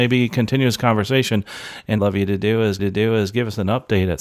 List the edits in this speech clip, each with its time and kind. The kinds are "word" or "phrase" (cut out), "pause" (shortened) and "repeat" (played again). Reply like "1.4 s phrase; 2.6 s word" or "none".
2.0 s phrase; 2.8 s repeat

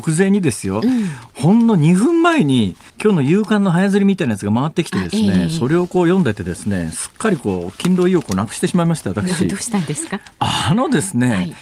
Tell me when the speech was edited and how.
2.9 s pause

